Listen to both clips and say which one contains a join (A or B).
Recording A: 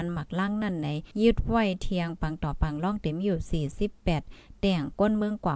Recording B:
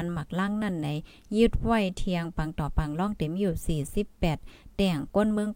A